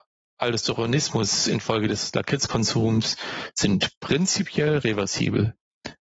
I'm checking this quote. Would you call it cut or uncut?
uncut